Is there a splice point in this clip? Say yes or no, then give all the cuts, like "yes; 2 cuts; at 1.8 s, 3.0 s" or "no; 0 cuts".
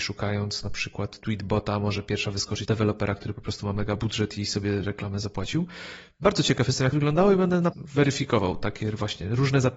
yes; 4 cuts; at 2.6 s, 4.8 s, 6.9 s, 7.7 s